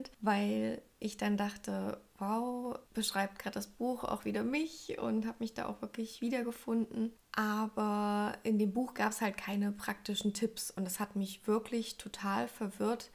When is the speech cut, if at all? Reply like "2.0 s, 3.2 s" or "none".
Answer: 2.9 s

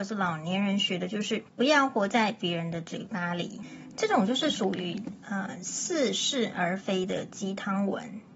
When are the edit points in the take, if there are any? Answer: 1.5 s

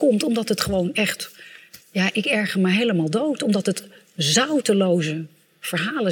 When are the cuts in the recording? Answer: 1.8 s

